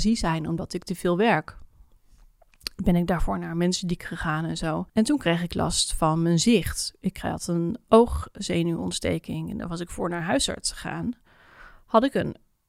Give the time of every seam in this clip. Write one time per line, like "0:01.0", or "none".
0:04.9